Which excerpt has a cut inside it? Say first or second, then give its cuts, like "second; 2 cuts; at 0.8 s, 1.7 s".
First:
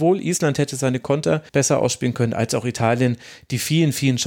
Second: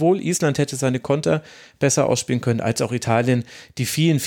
first; 1 cut; at 1.5 s